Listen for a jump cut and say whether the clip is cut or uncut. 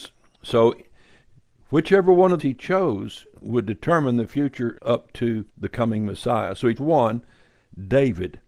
cut